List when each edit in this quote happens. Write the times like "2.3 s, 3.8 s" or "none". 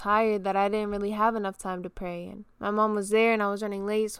2.5 s